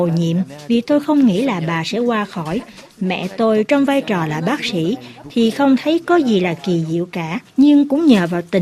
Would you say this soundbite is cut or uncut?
cut